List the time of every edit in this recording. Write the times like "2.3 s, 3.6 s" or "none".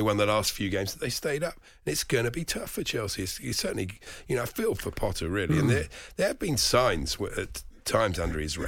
none

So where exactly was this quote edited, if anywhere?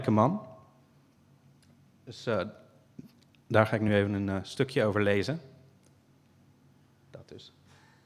none

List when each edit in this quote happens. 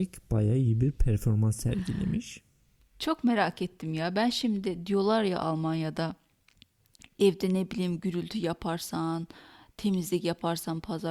none

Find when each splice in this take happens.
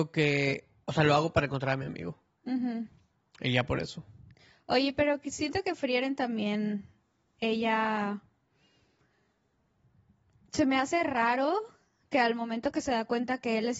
none

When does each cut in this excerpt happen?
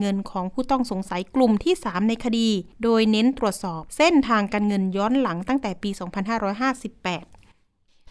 2.7 s, 3.9 s

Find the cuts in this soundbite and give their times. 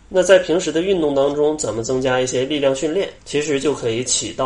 3.2 s

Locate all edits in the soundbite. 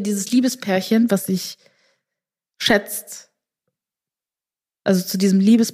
none

